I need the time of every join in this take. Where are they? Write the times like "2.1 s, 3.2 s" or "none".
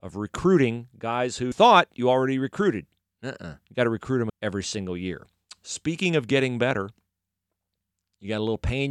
1.5 s, 4.3 s